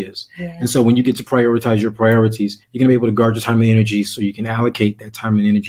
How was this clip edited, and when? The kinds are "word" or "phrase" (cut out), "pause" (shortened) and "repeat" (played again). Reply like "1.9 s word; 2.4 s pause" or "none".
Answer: 2.6 s pause